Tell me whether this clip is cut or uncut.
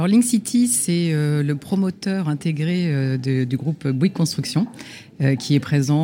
uncut